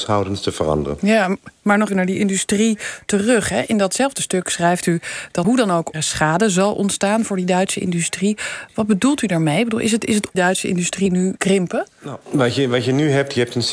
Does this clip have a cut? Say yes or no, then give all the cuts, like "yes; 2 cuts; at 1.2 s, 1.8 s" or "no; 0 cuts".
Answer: yes; 6 cuts; at 1.9 s, 5.4 s, 5.9 s, 10.3 s, 11.4 s, 12.2 s